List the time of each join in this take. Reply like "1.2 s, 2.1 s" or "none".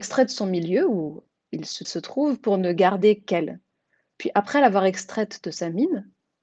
1.8 s